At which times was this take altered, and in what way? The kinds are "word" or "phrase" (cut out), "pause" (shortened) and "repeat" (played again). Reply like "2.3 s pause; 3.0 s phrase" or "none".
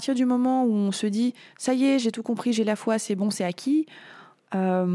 none